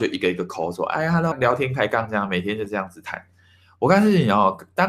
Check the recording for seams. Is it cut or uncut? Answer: cut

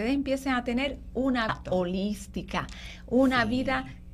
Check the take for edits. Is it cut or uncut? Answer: cut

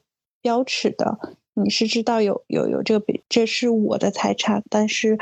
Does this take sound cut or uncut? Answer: cut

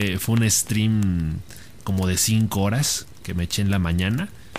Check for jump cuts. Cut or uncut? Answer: uncut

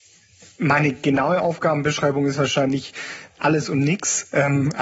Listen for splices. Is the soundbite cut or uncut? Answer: uncut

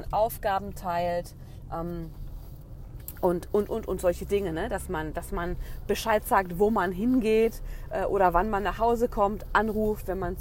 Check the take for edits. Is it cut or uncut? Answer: uncut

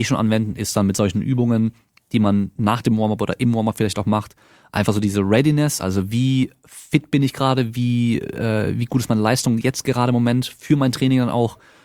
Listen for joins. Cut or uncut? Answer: uncut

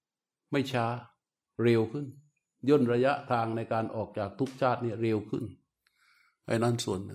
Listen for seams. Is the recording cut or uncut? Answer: cut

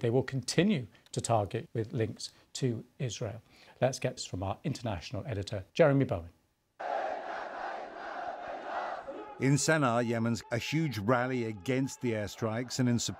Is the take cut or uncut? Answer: cut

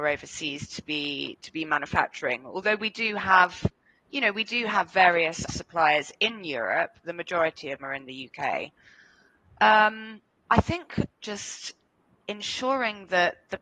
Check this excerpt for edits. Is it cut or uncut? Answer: cut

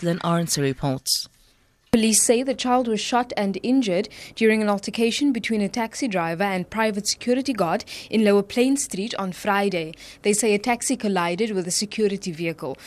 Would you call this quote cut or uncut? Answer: uncut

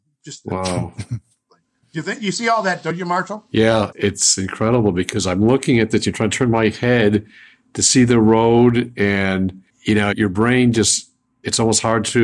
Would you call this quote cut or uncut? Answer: cut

